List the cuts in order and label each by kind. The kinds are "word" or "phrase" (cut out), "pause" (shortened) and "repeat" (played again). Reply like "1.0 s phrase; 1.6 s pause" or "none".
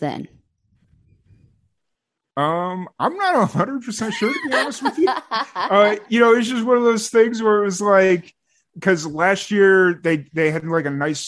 none